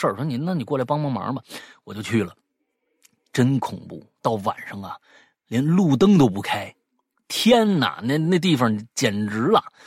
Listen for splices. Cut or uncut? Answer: uncut